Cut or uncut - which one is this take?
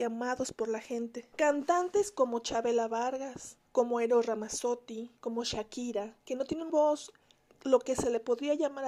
cut